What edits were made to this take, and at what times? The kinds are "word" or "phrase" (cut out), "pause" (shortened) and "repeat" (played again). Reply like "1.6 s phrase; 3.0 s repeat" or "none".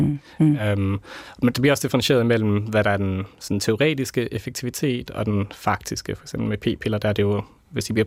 none